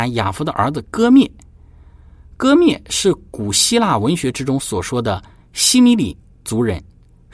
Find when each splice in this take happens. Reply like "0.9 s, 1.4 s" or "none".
none